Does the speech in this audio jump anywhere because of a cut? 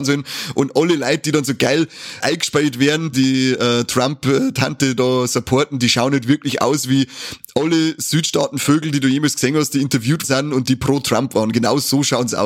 yes; 3 cuts; at 2.2 s, 3.1 s, 10.2 s

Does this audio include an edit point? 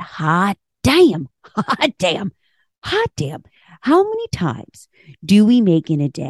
no; 0 cuts

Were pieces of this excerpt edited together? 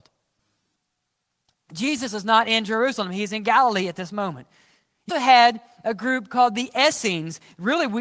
yes; 1 cut; at 5.1 s

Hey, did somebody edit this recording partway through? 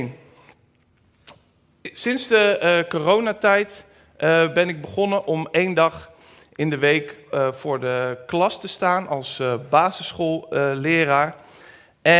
no; 0 cuts

